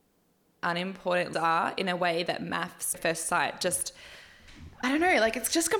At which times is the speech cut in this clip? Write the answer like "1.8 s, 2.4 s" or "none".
1.3 s, 2.9 s, 4.8 s